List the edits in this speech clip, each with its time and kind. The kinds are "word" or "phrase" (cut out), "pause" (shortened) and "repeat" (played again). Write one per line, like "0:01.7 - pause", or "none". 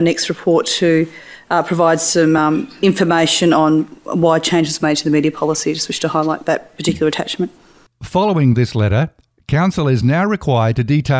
none